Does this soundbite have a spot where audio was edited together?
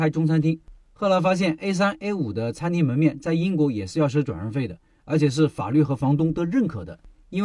no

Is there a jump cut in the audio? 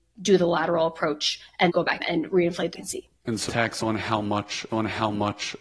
yes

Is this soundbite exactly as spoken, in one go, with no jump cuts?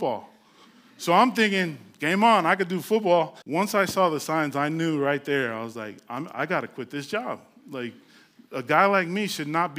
no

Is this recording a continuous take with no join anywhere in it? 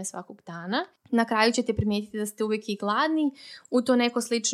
yes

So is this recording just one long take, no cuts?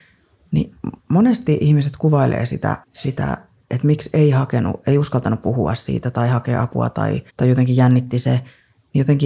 no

